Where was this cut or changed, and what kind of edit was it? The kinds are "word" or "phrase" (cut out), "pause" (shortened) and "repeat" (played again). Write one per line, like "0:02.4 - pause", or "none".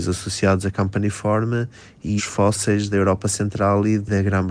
0:02.2 - word
0:02.9 - word